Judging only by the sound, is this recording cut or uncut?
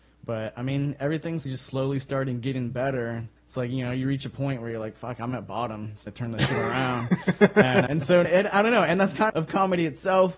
cut